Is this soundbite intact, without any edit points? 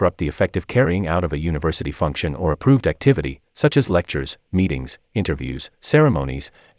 yes; 0 cuts

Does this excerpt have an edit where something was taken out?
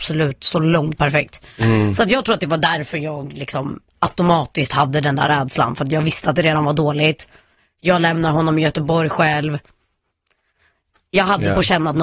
yes; 1 cut; at 1.0 s

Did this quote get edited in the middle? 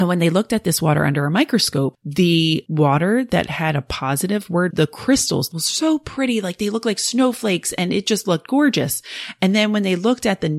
yes; 2 cuts; at 4.7 s, 5.5 s

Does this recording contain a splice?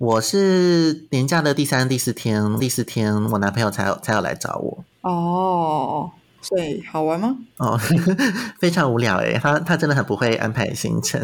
yes; 2 cuts; at 2.6 s, 7.5 s

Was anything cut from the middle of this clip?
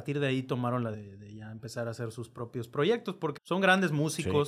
yes; 2 cuts; at 0.9 s, 3.4 s

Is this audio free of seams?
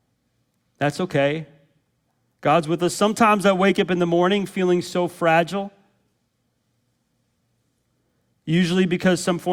yes; 0 cuts

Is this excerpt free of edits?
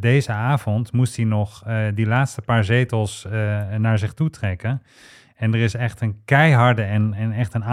yes; 0 cuts

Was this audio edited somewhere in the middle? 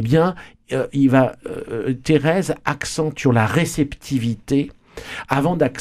yes; 1 cut; at 3.2 s

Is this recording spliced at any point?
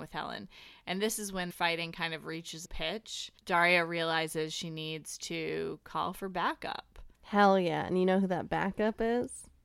yes; 4 cuts; at 1.5 s, 2.7 s, 3.4 s, 7.1 s

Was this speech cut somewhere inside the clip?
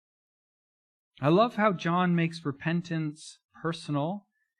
no; 0 cuts

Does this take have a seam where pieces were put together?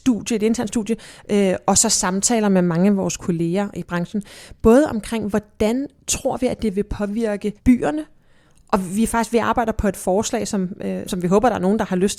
yes; 3 cuts; at 3.8 s, 7.6 s, 11.0 s

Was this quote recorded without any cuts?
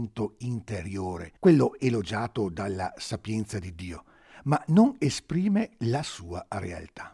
no; 1 cut; at 1.4 s

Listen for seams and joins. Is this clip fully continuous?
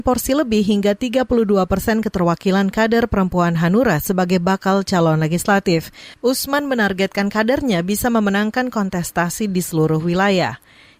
yes; 0 cuts

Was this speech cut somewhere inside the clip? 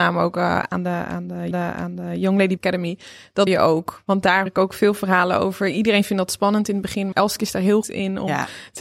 yes; 6 cuts; at 1.5 s, 2.6 s, 3.5 s, 4.5 s, 7.1 s, 7.8 s

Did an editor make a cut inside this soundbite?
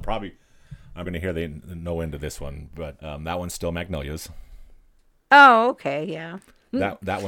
yes; 2 cuts; at 1.1 s, 3.0 s

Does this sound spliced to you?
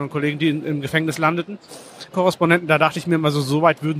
yes; 1 cut; at 2.1 s

